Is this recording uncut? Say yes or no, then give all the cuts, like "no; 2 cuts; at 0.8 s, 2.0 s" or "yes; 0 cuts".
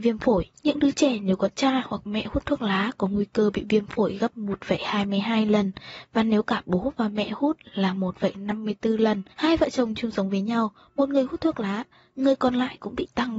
yes; 0 cuts